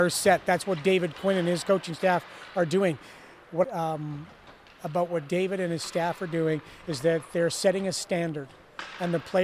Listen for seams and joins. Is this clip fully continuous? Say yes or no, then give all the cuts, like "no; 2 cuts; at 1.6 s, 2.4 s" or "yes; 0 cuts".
no; 1 cut; at 3.6 s